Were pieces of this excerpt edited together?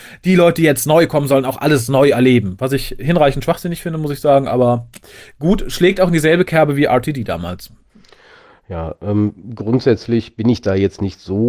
no; 0 cuts

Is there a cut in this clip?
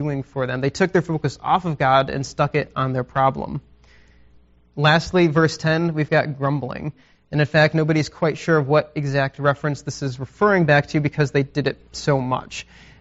no; 0 cuts

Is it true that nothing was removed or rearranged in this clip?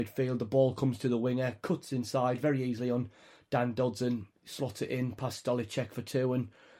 no; 1 cut; at 4.4 s

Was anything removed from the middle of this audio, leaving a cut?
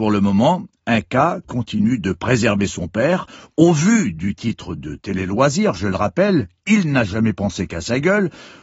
no; 0 cuts

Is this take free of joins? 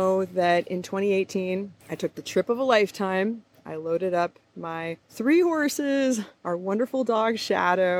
no; 1 cut; at 5.0 s

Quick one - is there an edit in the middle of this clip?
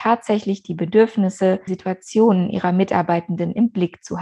yes; 1 cut; at 1.7 s

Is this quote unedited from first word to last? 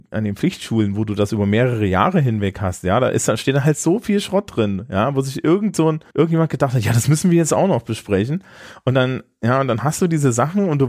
no; 1 cut; at 6.1 s

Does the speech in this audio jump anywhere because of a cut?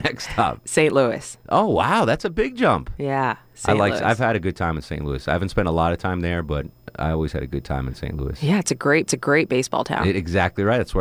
yes; 2 cuts; at 3.5 s, 9.1 s

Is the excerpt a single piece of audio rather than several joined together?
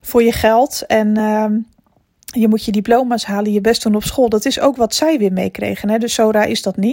yes; 0 cuts

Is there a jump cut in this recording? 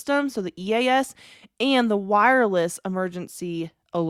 no; 0 cuts

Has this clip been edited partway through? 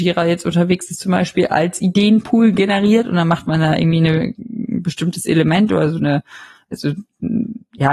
no; 0 cuts

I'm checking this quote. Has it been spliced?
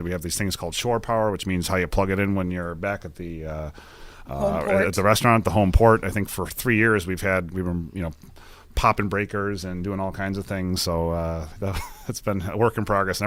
no; 0 cuts

